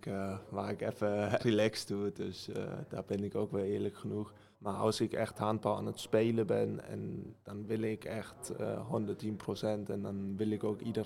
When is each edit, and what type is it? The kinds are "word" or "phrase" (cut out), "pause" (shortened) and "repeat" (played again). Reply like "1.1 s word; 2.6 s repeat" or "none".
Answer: 1.4 s word; 4.5 s pause